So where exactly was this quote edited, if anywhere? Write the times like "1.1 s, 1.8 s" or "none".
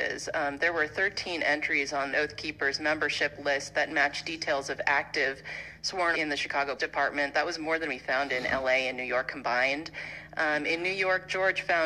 2.1 s, 6.1 s, 6.8 s